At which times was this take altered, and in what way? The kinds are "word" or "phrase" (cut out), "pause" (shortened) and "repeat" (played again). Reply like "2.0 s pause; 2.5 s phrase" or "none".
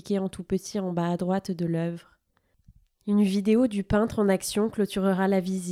none